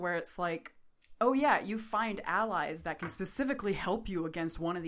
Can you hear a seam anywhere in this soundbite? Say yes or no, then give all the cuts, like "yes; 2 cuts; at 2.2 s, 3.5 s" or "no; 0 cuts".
no; 0 cuts